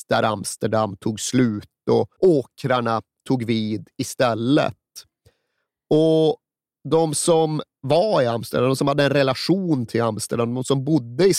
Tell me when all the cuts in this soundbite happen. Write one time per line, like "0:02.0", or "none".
0:02.2